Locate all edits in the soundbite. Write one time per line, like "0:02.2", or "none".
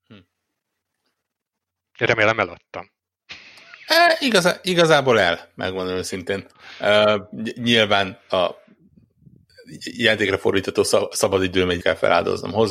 0:11.8